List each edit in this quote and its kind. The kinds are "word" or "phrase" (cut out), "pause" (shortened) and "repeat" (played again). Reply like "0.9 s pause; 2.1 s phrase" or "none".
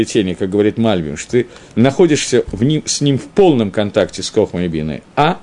none